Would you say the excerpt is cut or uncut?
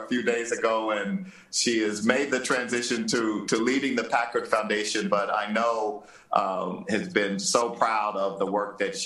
uncut